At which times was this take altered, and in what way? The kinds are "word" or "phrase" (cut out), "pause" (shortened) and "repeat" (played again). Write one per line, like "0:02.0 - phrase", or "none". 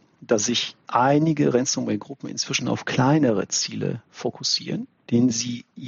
none